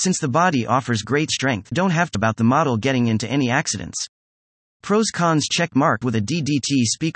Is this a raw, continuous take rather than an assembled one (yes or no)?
no